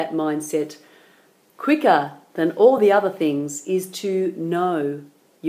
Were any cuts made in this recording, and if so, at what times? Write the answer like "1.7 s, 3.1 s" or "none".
none